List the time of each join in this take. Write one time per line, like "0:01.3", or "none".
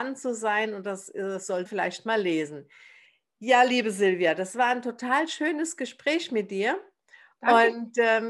0:01.7